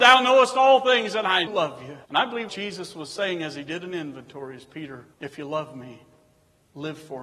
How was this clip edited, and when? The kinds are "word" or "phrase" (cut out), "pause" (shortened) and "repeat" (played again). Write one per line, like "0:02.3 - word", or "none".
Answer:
0:01.5 - word
0:02.1 - pause
0:02.5 - word
0:05.1 - pause